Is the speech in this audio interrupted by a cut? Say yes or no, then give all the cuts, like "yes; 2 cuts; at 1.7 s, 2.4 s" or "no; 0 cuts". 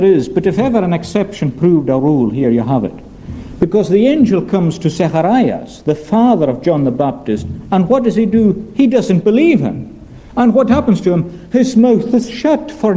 no; 0 cuts